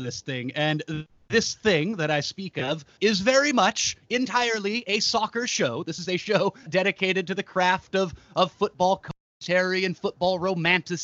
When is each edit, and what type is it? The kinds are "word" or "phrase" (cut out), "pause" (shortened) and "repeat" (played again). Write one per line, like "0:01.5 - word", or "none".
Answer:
0:03.0 - word
0:06.7 - word